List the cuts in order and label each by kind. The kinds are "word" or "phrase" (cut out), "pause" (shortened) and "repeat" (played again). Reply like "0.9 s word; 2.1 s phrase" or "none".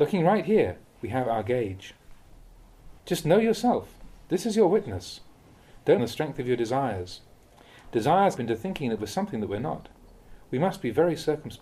3.0 s pause; 6.0 s phrase; 8.4 s phrase